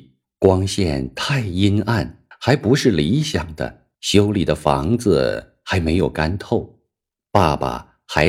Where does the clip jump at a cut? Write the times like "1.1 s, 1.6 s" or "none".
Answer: 2.3 s, 3.9 s